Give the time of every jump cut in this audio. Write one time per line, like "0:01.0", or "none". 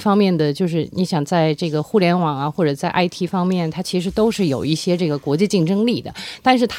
none